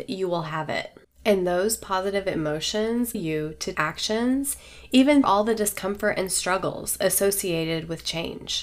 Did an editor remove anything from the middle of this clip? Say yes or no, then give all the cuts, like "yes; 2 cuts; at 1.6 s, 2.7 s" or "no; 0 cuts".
yes; 4 cuts; at 1.0 s, 3.1 s, 3.7 s, 5.2 s